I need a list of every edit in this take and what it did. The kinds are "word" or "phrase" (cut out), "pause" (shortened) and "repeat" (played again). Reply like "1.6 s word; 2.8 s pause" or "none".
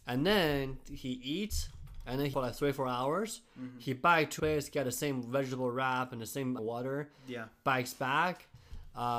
2.3 s word; 4.4 s phrase; 6.6 s phrase

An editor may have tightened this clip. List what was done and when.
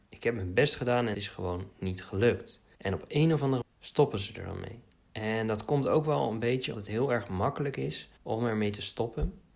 1.1 s word; 2.7 s pause; 3.6 s word; 4.9 s pause; 6.7 s word; 8.2 s pause

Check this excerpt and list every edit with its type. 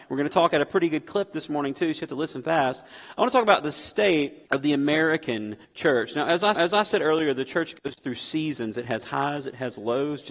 4.5 s pause; 5.6 s pause; 6.5 s repeat

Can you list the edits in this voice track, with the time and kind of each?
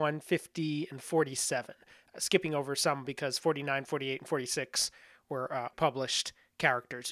5.7 s word

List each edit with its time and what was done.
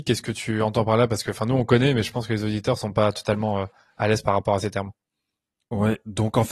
none

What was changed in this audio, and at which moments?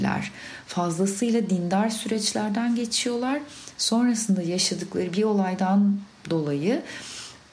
none

